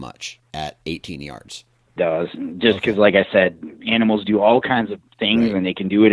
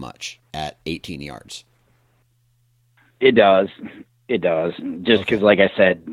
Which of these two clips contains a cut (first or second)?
first